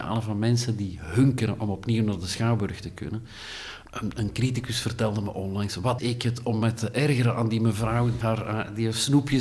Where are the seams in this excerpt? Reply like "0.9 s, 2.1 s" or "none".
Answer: 6.0 s, 8.2 s